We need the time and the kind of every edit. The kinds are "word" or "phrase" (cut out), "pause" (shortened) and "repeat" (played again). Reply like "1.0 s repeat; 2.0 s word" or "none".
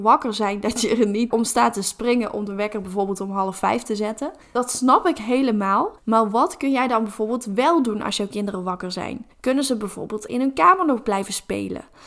1.3 s word; 4.4 s pause; 6.0 s pause; 9.3 s pause; 10.3 s word